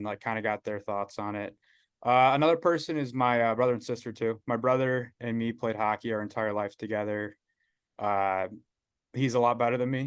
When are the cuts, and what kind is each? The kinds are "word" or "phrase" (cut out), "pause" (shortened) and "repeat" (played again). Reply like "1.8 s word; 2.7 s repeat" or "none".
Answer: none